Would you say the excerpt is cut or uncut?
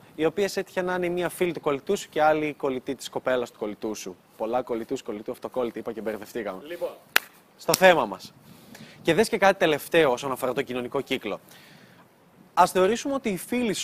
uncut